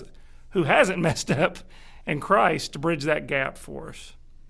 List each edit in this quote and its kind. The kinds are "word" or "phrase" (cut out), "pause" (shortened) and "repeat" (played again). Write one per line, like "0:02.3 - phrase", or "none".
none